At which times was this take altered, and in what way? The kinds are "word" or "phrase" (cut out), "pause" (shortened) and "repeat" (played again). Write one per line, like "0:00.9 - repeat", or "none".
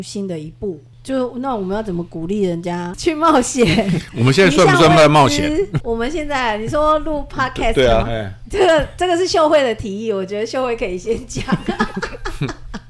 0:08.0 - word